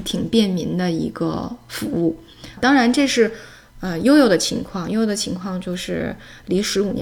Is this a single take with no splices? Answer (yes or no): no